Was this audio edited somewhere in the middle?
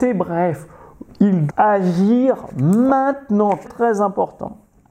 yes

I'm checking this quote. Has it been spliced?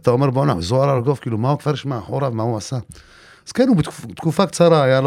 no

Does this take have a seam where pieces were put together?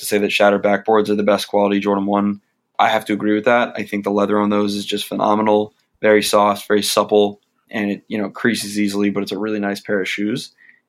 no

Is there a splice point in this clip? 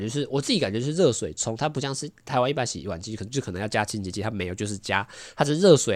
no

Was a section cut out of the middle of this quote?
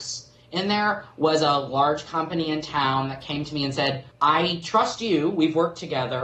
yes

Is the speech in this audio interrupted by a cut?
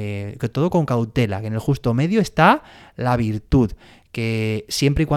no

